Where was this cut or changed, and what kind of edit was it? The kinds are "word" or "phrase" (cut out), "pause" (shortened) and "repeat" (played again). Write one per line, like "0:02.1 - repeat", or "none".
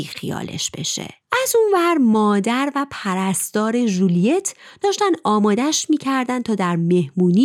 none